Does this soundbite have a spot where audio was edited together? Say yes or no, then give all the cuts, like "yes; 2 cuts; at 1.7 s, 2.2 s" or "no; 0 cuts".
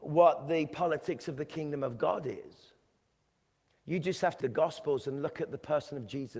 yes; 2 cuts; at 3.1 s, 4.4 s